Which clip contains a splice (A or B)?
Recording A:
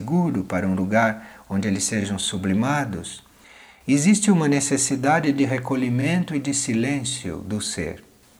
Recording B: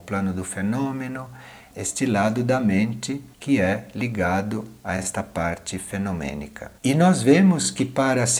B